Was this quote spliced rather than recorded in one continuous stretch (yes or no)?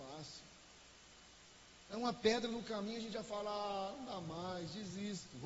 no